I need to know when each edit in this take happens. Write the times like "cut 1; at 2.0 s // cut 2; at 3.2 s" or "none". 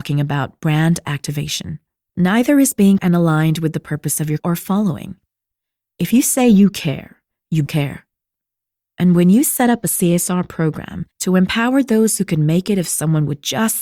cut 1; at 3.0 s // cut 2; at 4.4 s // cut 3; at 7.7 s // cut 4; at 11.1 s

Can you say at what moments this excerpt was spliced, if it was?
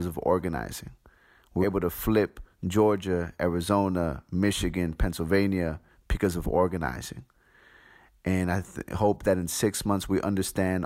cut 1; at 1.6 s

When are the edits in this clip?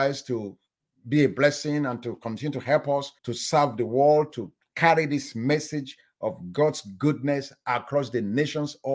cut 1; at 3.2 s

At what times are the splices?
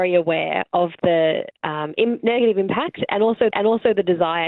cut 1; at 3.5 s

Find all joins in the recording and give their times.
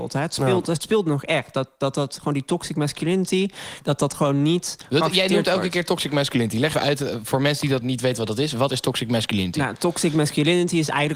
cut 1; at 6.7 s // cut 2; at 7.8 s

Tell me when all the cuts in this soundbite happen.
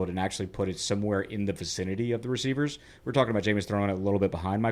none

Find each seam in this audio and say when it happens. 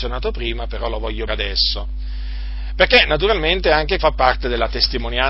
cut 1; at 1.3 s // cut 2; at 4.0 s

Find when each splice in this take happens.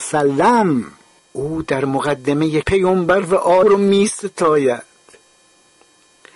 cut 1; at 1.2 s // cut 2; at 2.6 s // cut 3; at 3.6 s

